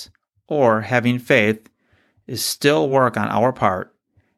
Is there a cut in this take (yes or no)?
no